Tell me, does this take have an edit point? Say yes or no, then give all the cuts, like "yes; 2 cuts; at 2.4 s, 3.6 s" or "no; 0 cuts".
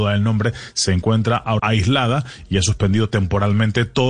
yes; 1 cut; at 1.6 s